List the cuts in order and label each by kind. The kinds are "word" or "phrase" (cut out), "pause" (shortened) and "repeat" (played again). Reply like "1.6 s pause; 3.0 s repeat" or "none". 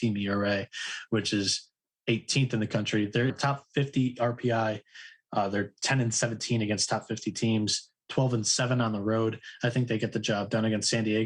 3.3 s phrase

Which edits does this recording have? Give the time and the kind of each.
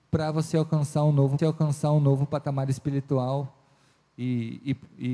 1.4 s repeat

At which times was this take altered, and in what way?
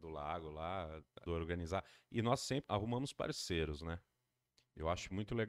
1.3 s phrase; 2.6 s word

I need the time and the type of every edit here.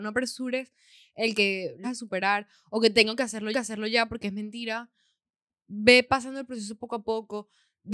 1.8 s word; 3.5 s repeat

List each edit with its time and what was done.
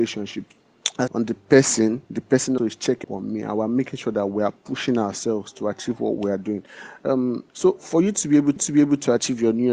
1.1 s phrase; 2.0 s pause; 2.6 s word; 3.0 s word; 7.5 s pause; 8.6 s repeat

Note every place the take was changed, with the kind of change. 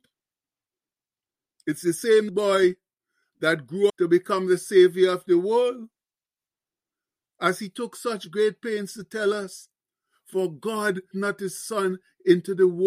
2.3 s word; 3.9 s word; 11.1 s word

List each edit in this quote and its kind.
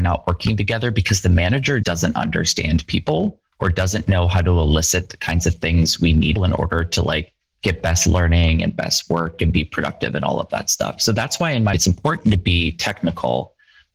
1.8 s word; 6.4 s phrase; 7.4 s pause; 11.7 s word

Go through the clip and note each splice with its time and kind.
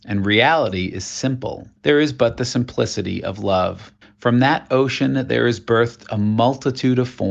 1.8 s pause; 4.0 s pause

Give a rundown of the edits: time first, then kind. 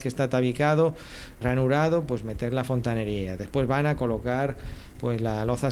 1.4 s word

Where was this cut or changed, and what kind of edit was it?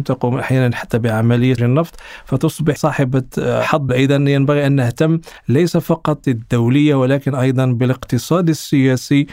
1.6 s word; 2.8 s word; 3.9 s phrase; 5.4 s pause; 6.2 s word

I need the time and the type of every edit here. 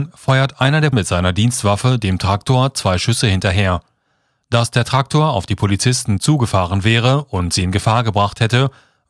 0.9 s word

